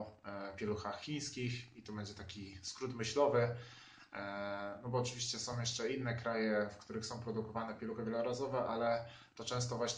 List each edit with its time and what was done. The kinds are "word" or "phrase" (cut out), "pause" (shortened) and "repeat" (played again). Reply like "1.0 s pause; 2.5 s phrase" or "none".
none